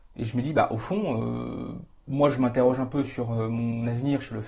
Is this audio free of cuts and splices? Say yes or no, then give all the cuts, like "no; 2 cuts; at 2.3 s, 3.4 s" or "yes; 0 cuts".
yes; 0 cuts